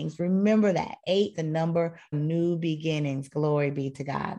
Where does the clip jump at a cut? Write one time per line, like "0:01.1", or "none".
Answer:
0:01.3
0:02.1